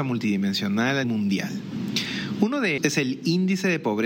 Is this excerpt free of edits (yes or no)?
no